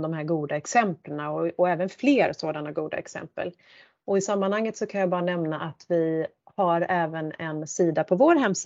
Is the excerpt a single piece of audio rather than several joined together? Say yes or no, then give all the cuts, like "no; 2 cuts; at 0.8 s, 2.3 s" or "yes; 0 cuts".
yes; 0 cuts